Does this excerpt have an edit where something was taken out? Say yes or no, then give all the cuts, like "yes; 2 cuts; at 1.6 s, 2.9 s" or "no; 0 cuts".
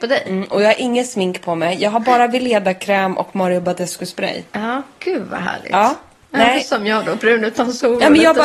no; 0 cuts